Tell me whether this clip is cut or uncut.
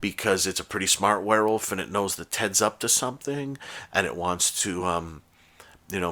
uncut